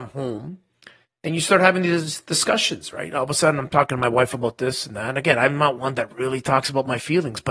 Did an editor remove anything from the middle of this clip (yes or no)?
no